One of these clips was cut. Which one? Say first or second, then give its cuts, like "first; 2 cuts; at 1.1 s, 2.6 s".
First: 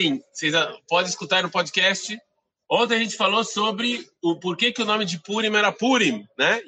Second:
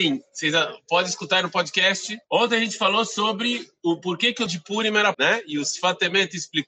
second; 3 cuts; at 2.2 s, 4.5 s, 5.1 s